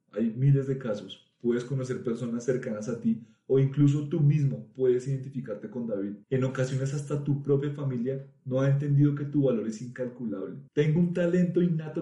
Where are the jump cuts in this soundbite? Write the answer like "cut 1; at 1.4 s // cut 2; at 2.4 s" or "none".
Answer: cut 1; at 6.2 s // cut 2; at 10.7 s